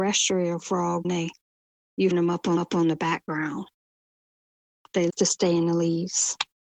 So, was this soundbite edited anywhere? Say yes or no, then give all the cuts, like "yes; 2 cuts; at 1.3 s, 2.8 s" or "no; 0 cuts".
yes; 4 cuts; at 1.0 s, 2.1 s, 2.6 s, 5.1 s